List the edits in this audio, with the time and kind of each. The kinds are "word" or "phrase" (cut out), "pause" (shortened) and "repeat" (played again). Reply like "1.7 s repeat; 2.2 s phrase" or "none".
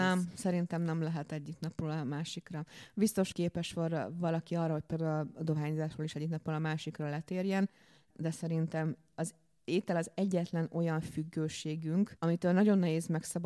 3.3 s word